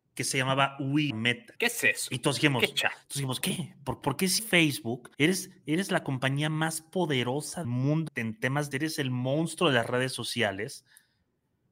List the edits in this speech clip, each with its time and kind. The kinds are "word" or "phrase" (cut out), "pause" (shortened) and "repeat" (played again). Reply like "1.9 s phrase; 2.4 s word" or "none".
1.1 s word; 1.5 s pause; 3.4 s phrase; 4.0 s word; 4.4 s word; 5.1 s pause; 7.6 s word; 8.1 s word; 8.7 s word